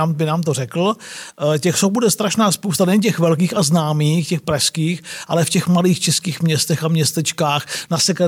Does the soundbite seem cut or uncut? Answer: uncut